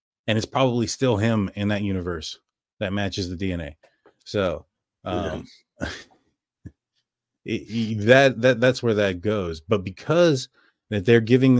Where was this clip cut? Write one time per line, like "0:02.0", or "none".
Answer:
none